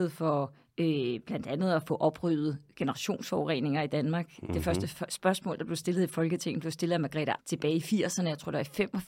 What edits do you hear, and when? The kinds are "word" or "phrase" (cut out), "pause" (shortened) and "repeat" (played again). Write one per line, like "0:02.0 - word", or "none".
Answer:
0:07.4 - word